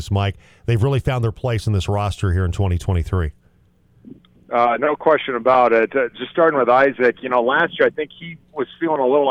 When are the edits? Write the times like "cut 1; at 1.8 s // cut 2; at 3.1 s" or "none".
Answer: none